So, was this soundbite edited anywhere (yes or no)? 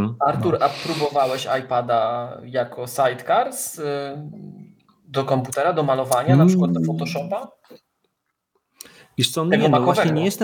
no